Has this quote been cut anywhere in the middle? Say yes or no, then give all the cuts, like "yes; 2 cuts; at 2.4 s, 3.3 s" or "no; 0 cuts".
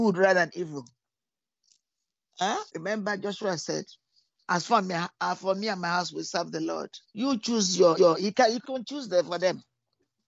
yes; 5 cuts; at 2.7 s, 4.3 s, 7.0 s, 8.0 s, 8.6 s